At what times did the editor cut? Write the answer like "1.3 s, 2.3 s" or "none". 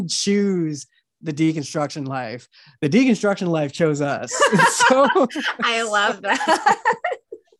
none